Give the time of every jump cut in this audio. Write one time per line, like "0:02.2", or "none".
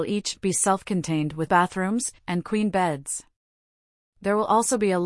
0:01.5
0:02.2